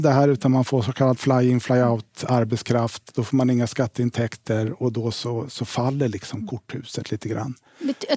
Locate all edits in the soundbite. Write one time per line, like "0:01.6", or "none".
none